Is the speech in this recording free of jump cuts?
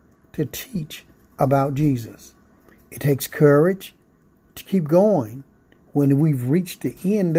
yes; 0 cuts

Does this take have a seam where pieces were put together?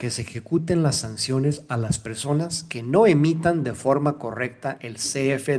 no; 0 cuts

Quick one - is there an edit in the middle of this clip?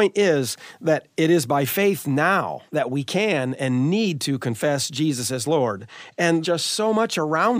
yes; 2 cuts; at 2.7 s, 6.4 s

